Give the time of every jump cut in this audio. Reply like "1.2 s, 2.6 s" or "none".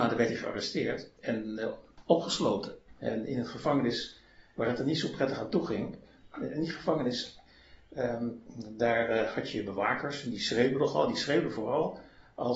1.1 s